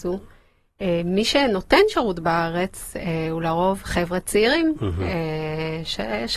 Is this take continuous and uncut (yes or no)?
yes